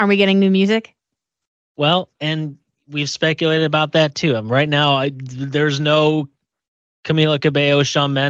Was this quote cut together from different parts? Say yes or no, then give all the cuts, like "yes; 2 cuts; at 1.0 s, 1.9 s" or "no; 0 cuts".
no; 0 cuts